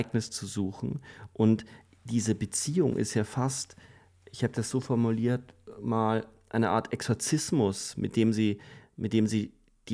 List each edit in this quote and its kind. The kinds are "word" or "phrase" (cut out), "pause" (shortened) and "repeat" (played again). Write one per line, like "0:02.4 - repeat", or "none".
none